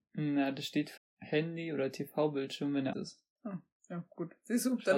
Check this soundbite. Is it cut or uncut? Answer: cut